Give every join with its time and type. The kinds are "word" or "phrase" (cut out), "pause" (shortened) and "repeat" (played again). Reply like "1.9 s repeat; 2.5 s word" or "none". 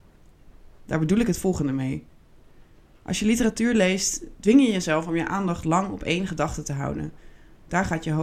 none